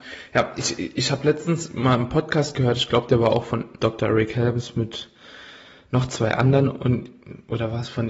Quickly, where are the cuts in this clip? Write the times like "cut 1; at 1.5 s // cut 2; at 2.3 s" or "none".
none